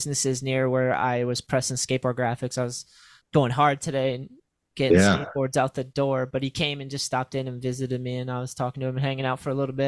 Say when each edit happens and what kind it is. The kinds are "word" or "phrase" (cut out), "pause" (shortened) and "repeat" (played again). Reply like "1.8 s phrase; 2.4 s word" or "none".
none